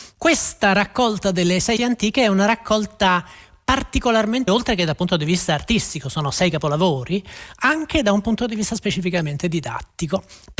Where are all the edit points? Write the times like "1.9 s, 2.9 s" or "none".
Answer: 1.8 s, 4.5 s